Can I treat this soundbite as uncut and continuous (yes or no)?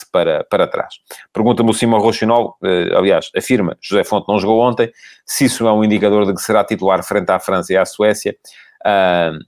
yes